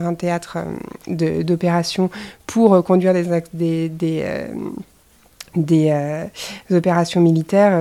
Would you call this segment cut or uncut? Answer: uncut